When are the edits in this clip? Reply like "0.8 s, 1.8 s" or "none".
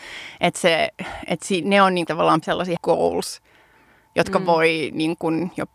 1.6 s, 2.1 s, 2.4 s, 2.8 s